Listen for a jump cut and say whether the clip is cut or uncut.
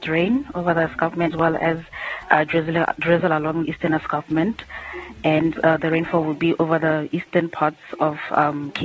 cut